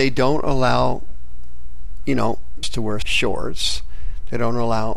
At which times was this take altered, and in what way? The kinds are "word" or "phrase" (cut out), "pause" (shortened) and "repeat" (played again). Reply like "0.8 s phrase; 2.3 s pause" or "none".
2.6 s word; 3.0 s phrase